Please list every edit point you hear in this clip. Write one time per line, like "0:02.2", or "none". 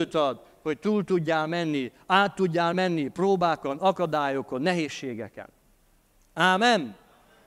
none

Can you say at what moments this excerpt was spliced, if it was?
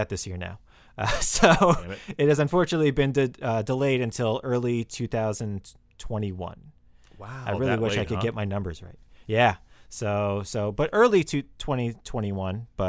none

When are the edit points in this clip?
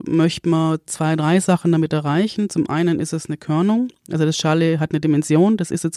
none

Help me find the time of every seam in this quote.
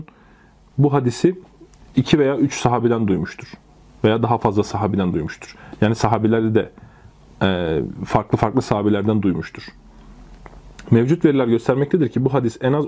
none

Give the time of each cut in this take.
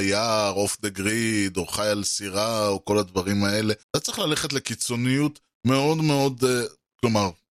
0:03.8

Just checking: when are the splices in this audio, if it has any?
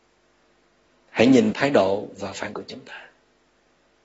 0:01.5
0:02.5

